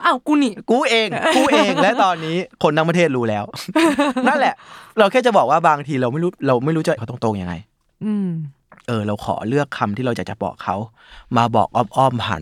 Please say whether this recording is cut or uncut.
cut